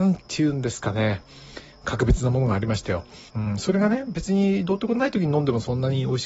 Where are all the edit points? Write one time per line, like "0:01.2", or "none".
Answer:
0:03.3